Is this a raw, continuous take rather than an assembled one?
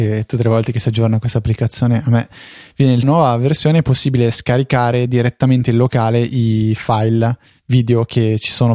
no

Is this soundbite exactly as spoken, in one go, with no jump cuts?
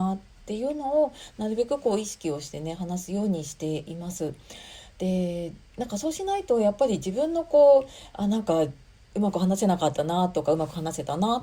yes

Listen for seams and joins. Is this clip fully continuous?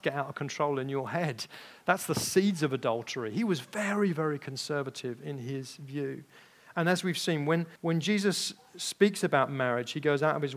no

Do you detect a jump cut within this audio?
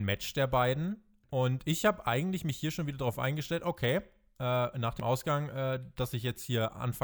no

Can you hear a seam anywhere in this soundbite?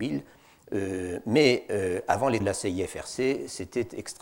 yes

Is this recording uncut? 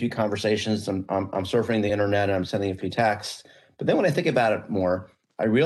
yes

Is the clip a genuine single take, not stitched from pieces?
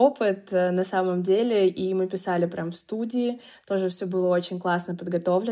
yes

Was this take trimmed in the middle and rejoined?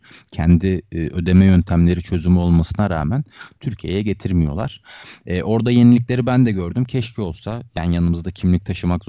no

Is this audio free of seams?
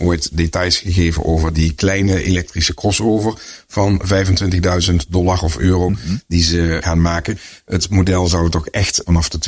yes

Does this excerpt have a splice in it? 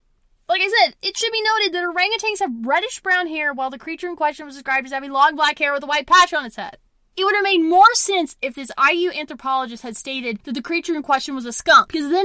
yes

